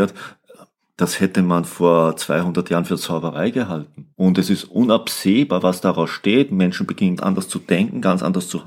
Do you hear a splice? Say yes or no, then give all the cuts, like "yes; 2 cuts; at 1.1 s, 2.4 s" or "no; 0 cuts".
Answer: yes; 2 cuts; at 4.1 s, 7.2 s